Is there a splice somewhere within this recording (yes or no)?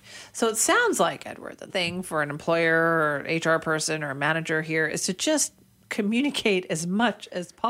yes